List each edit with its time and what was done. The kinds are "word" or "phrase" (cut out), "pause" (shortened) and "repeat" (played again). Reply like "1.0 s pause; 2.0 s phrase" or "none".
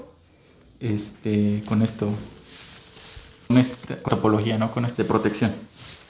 3.5 s word; 4.1 s word; 4.9 s word